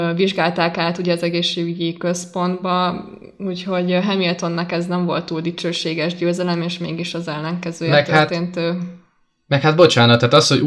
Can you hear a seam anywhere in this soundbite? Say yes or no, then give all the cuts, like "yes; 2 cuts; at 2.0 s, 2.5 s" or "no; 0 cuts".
no; 0 cuts